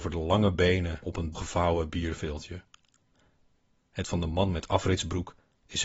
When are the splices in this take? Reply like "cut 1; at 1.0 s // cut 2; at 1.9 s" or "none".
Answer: cut 1; at 1.0 s // cut 2; at 1.3 s // cut 3; at 4.0 s

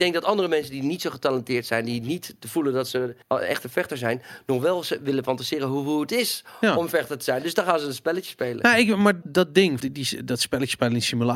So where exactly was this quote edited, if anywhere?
cut 1; at 3.2 s // cut 2; at 9.2 s // cut 3; at 9.8 s

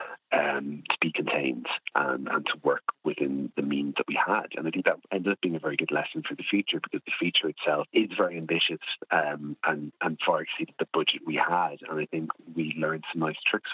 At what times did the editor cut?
cut 1; at 3.5 s // cut 2; at 7.9 s

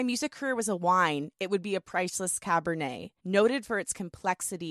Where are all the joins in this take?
cut 1; at 3.2 s

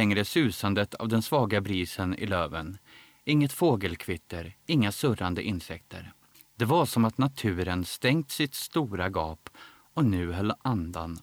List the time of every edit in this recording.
cut 1; at 6.3 s

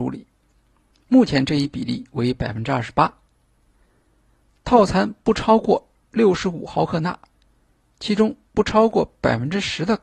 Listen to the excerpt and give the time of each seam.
none

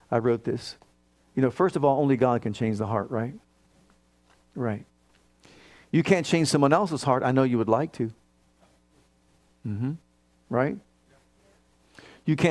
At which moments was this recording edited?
none

